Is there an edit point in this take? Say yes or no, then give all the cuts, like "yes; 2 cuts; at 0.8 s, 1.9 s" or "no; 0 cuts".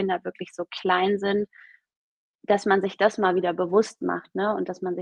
no; 0 cuts